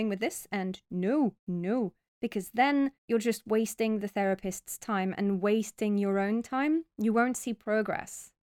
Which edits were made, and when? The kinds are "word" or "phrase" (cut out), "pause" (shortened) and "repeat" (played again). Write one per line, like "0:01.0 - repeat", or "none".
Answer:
0:01.4 - pause
0:03.0 - pause

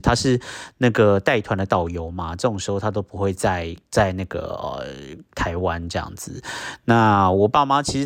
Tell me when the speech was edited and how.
0:03.8 - pause

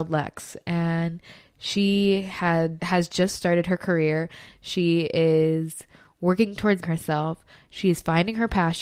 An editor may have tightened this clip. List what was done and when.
0:02.8 - word
0:06.8 - word

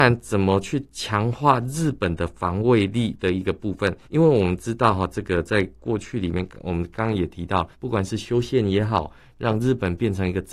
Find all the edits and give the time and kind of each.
0:04.0 - pause
0:07.7 - pause

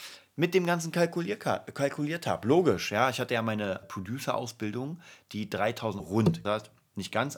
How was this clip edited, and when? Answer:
0:03.8 - word
0:06.0 - word
0:06.4 - word

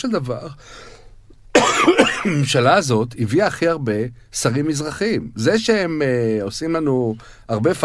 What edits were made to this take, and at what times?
none

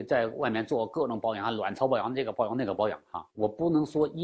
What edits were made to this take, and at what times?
0:03.3 - pause

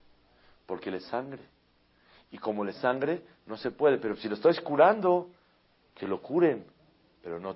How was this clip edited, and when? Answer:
0:01.0 - word
0:02.7 - word

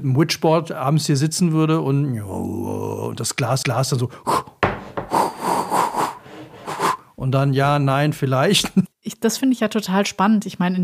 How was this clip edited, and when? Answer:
0:03.6 - repeat
0:08.9 - pause

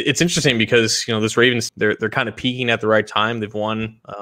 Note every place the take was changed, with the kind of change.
0:01.7 - word

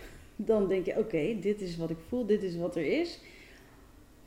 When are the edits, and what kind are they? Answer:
none

